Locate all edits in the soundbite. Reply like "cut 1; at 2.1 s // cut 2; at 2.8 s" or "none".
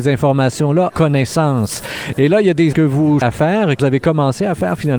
cut 1; at 0.9 s // cut 2; at 2.7 s // cut 3; at 3.2 s // cut 4; at 3.8 s